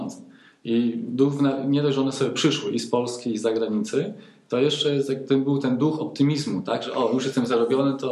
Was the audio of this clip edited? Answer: no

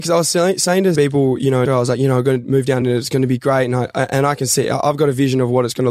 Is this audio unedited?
no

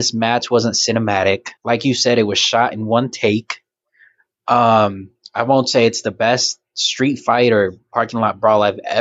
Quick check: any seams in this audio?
yes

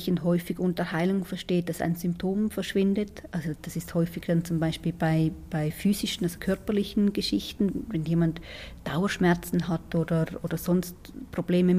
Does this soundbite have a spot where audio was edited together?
no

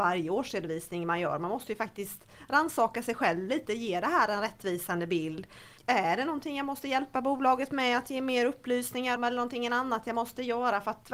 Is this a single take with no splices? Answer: no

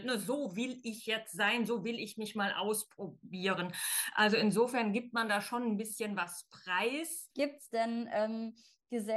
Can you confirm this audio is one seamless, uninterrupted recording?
yes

